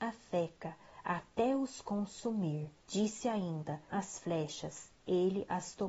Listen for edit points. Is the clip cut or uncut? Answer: cut